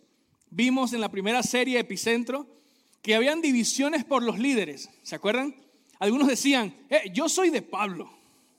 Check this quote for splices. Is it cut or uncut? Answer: uncut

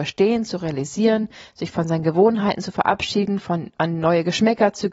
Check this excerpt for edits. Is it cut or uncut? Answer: uncut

